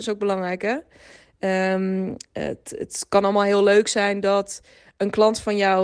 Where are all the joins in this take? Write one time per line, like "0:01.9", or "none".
none